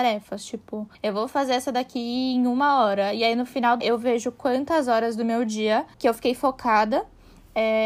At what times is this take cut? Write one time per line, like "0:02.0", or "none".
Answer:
0:00.9
0:03.8
0:05.9